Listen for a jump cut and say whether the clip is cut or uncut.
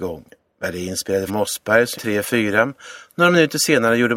cut